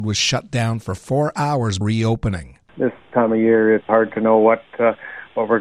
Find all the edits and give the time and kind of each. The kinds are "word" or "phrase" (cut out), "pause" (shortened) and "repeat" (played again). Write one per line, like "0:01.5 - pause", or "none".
0:01.8 - word
0:03.9 - word